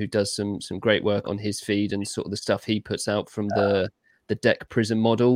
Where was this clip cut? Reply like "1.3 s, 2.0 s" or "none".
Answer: 1.2 s